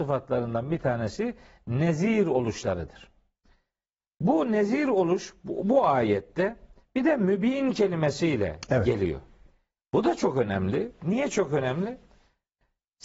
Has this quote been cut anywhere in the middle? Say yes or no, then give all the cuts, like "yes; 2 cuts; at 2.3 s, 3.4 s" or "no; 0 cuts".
no; 0 cuts